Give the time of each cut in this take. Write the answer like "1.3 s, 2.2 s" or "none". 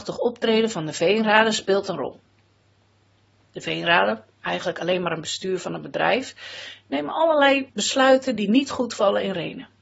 none